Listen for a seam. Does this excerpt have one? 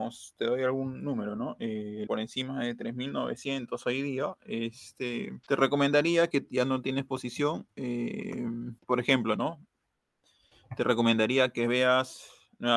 yes; 4 cuts; at 2.1 s, 5.4 s, 6.3 s, 8.8 s

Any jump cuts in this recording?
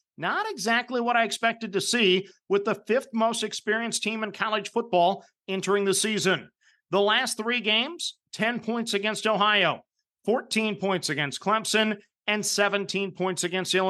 no; 0 cuts

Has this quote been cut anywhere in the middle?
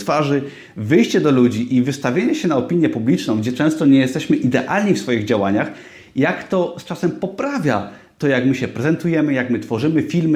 no; 0 cuts

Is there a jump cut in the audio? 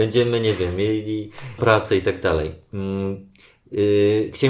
yes; 1 cut; at 1.6 s

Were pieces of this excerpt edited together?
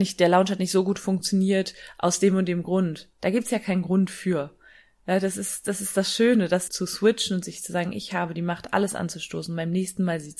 yes; 1 cut; at 6.7 s

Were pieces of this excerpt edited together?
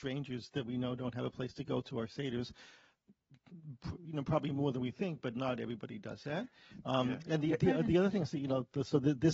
no; 0 cuts

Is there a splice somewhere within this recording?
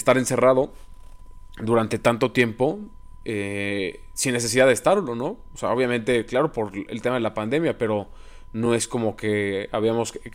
no; 0 cuts

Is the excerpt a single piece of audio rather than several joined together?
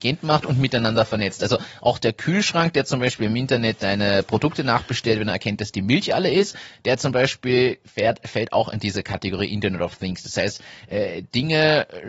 yes; 0 cuts

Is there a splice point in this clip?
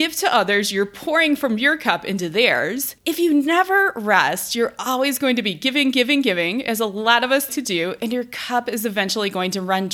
yes; 2 cuts; at 3.0 s, 7.5 s

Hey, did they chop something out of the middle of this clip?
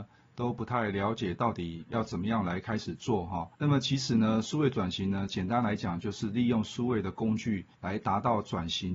yes; 2 cuts; at 3.5 s, 7.7 s

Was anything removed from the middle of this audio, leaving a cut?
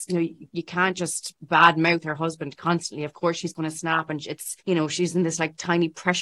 yes; 1 cut; at 4.6 s

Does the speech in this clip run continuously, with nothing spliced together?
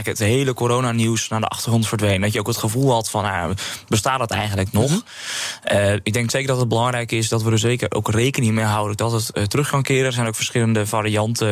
yes; 0 cuts

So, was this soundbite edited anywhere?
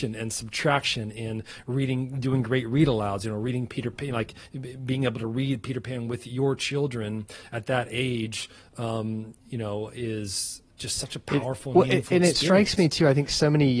no; 0 cuts

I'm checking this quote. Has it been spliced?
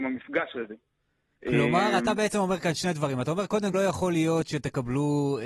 yes; 1 cut; at 3.7 s

